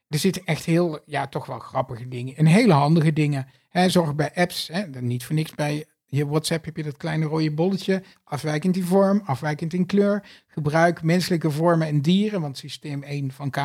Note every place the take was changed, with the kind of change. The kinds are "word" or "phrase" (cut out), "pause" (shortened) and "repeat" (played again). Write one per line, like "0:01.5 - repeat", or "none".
none